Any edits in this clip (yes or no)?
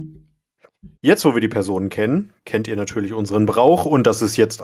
yes